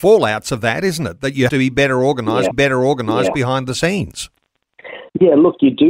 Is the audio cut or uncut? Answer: cut